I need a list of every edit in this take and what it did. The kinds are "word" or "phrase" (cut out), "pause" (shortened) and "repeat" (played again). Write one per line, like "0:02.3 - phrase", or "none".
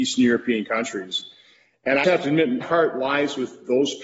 0:02.0 - word
0:02.6 - word